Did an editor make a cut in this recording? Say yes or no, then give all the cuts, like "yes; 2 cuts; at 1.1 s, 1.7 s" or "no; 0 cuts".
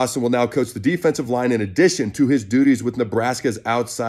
no; 0 cuts